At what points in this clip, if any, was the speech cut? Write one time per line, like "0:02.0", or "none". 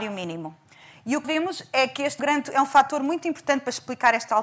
0:01.2
0:02.2